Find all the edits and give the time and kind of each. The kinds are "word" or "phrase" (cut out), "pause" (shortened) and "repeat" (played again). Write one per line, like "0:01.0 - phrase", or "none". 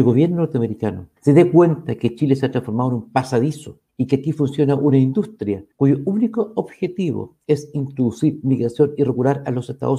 0:01.2 - pause
0:03.9 - pause
0:05.7 - pause

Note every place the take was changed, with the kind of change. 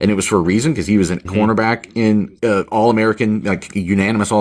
0:01.2 - word
0:02.4 - word

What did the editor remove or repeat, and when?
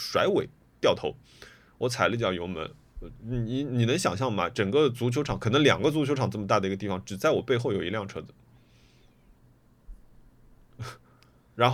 none

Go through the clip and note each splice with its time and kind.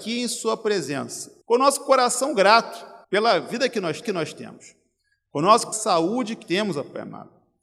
0:01.4 - pause
0:03.0 - pause
0:04.0 - repeat
0:05.7 - phrase
0:06.4 - word

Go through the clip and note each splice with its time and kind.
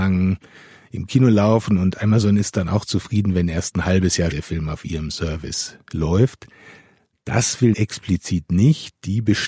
0:04.3 - word
0:07.7 - word

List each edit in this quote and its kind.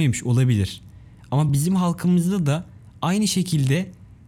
none

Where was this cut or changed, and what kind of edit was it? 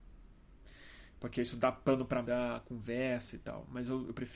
0:02.2 - word

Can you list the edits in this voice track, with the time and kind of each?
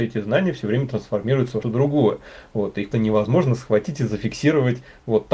0:01.6 - word
0:02.9 - word

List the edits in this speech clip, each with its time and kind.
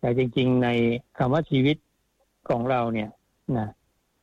0:01.1 - pause

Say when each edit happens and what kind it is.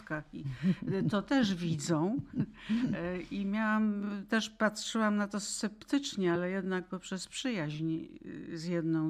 none

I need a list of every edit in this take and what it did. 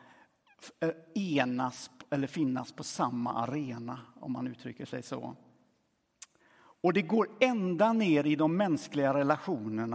0:06.4 - pause

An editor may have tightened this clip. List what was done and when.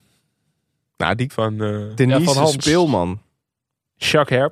0:01.3 - phrase

